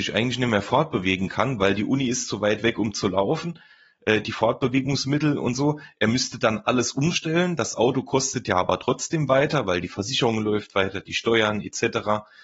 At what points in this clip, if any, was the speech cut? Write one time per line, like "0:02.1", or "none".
none